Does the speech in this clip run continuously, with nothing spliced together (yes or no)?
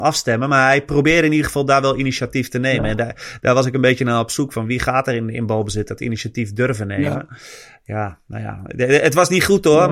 yes